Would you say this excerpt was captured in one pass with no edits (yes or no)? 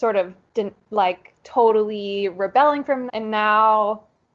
no